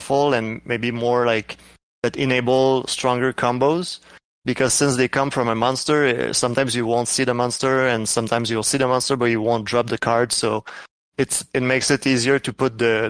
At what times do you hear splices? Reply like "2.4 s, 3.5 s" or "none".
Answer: none